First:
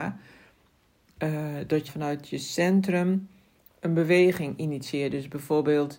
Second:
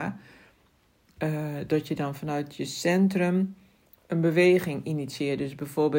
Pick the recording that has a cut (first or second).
first